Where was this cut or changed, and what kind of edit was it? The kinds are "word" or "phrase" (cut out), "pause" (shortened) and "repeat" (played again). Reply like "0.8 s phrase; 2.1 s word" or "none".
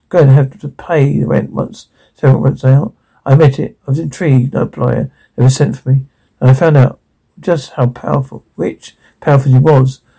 none